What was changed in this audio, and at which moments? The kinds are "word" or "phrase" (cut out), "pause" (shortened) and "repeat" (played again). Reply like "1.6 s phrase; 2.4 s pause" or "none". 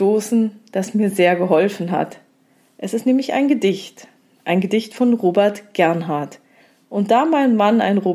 none